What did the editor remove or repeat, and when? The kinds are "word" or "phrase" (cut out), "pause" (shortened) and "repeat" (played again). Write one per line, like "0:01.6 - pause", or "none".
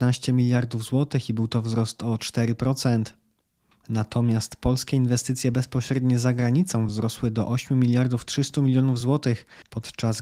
none